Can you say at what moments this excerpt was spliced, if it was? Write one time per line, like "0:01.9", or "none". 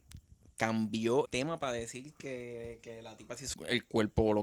0:01.2
0:03.5